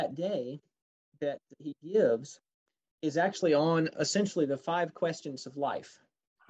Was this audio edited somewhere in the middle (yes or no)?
no